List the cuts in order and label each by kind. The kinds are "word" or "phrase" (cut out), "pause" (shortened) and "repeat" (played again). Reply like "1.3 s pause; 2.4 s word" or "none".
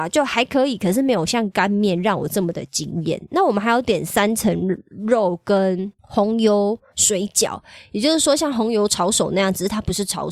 6.0 s pause